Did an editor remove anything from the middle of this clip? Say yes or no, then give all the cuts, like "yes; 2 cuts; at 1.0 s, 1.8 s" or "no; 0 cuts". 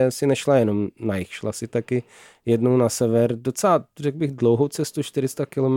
no; 0 cuts